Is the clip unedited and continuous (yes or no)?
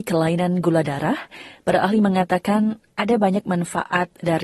yes